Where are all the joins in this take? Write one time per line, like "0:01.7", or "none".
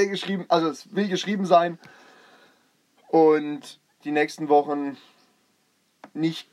0:04.0